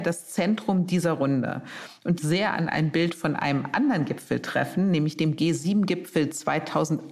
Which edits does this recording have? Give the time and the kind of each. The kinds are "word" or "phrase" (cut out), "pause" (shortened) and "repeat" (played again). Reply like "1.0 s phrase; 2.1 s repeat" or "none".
2.2 s phrase